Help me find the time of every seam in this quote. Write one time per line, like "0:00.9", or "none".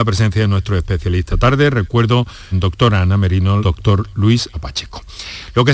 0:01.3
0:02.5
0:03.6
0:04.5

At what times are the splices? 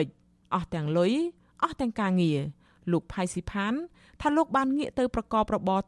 none

